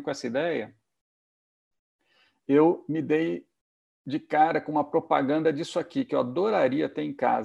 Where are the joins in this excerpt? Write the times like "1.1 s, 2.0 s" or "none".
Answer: none